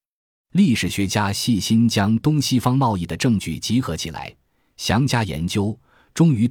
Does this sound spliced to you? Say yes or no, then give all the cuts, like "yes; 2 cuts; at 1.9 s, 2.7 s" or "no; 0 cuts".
no; 0 cuts